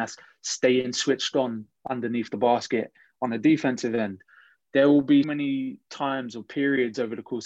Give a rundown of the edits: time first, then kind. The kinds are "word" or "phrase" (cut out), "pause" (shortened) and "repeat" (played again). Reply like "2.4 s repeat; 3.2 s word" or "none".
5.2 s word